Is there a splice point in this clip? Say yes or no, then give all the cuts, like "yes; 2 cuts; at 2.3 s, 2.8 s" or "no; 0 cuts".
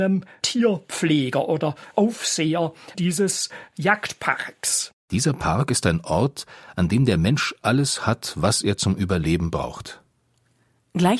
yes; 2 cuts; at 2.9 s, 5.0 s